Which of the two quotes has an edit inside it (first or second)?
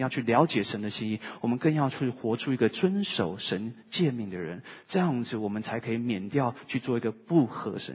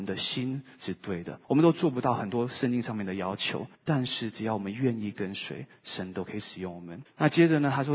second